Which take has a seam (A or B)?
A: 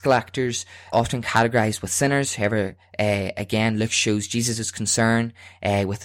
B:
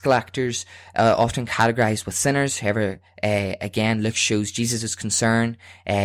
A